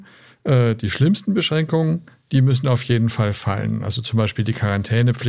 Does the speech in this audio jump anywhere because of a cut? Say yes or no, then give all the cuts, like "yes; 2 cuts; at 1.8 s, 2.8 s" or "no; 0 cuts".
no; 0 cuts